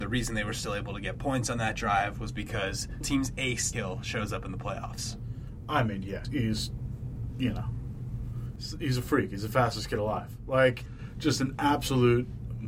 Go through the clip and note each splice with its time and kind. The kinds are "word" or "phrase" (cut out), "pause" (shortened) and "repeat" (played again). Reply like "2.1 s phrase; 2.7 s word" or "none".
3.0 s word; 3.7 s word; 6.2 s word; 10.9 s word

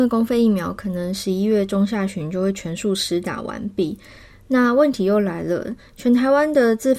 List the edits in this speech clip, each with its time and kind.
none

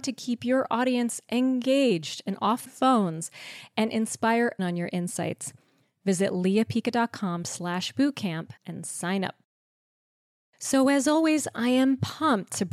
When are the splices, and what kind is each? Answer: 2.7 s word; 4.6 s word; 8.6 s pause

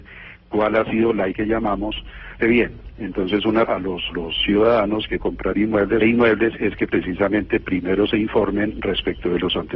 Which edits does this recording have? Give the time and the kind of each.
1.3 s phrase; 2.4 s phrase; 3.6 s word; 4.1 s word; 5.2 s word; 6.0 s phrase

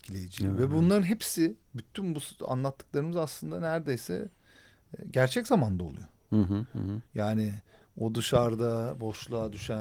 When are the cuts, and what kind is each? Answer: 7.1 s pause

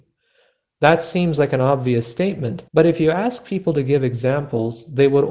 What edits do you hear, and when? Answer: 2.7 s pause

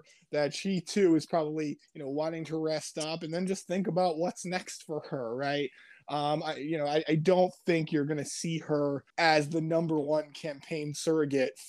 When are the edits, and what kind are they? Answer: 9.1 s pause

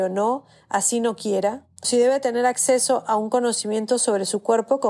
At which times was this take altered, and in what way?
1.8 s word

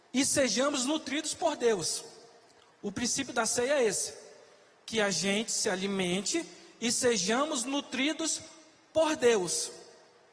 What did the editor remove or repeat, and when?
none

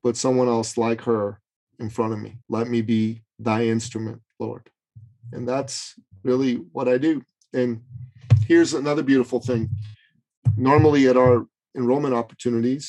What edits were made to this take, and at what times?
2.4 s pause

